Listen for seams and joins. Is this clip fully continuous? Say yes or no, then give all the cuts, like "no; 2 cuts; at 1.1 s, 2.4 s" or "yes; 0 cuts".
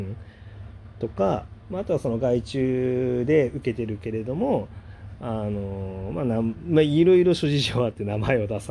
yes; 0 cuts